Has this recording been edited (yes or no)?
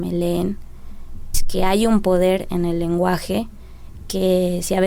yes